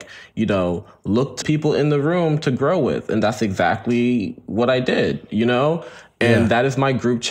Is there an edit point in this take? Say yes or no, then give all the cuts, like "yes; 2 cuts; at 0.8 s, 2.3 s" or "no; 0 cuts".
yes; 1 cut; at 1.4 s